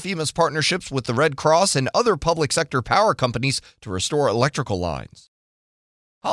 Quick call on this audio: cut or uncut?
uncut